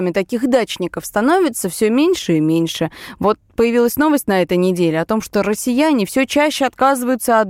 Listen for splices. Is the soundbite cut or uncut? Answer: uncut